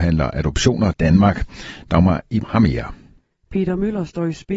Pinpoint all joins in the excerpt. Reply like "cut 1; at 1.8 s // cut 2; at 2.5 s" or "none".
cut 1; at 0.9 s // cut 2; at 2.4 s